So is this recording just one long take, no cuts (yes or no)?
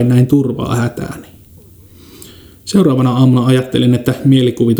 yes